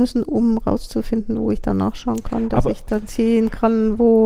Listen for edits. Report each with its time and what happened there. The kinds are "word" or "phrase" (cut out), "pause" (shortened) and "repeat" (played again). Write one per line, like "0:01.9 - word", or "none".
none